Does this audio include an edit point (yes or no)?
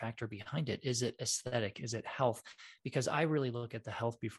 no